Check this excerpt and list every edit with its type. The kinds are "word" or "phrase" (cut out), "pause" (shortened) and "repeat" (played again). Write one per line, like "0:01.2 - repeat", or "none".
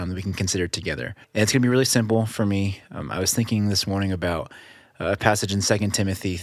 0:01.2 - pause